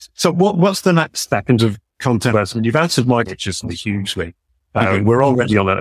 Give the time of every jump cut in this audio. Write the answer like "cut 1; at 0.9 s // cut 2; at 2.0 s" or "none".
cut 1; at 1.6 s // cut 2; at 2.3 s // cut 3; at 3.3 s // cut 4; at 3.6 s